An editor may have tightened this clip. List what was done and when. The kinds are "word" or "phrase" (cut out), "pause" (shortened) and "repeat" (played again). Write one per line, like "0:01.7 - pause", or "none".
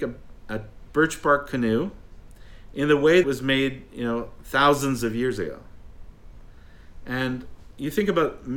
0:03.2 - phrase

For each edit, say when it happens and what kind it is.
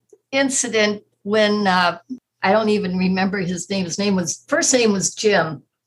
none

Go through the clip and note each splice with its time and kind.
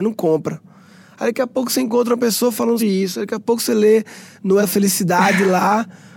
0:02.8 - word
0:04.6 - word

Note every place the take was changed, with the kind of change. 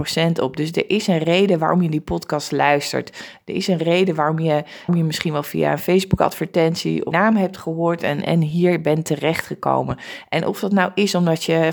0:04.9 - phrase
0:07.1 - phrase

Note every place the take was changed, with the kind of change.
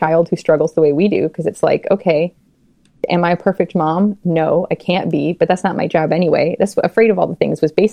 none

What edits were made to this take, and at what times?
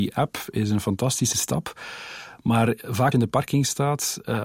0:01.3 - word
0:03.1 - word

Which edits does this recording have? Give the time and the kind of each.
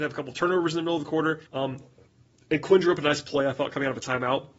0:01.5 - pause

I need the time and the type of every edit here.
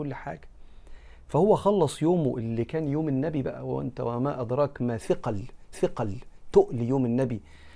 0:05.7 - repeat

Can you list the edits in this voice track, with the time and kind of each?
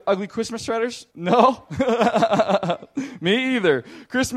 0:01.1 - pause

